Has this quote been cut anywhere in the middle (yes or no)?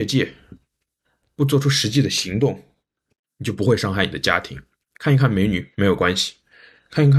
no